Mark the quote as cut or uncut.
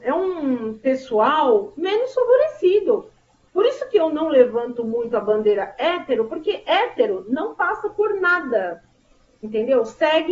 uncut